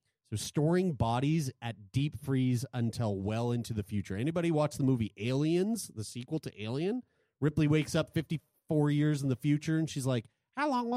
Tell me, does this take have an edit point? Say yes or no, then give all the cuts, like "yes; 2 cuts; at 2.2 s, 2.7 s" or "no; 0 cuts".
no; 0 cuts